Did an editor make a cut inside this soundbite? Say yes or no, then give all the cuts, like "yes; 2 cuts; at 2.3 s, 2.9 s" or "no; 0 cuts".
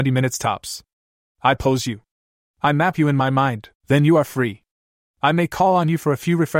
yes; 1 cut; at 3.7 s